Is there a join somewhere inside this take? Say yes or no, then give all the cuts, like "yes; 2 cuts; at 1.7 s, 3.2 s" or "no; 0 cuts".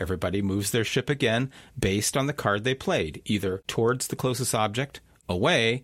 no; 0 cuts